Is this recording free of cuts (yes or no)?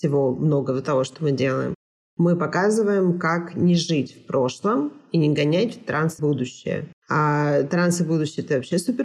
no